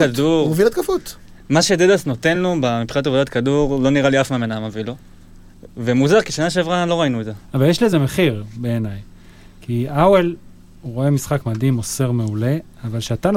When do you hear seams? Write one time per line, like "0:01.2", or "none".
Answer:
none